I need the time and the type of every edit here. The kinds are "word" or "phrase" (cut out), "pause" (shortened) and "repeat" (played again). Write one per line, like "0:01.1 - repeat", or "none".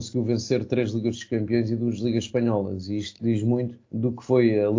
0:03.8 - pause